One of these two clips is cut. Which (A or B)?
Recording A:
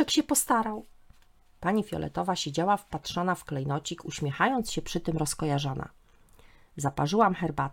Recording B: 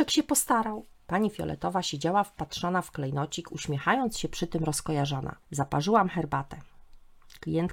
B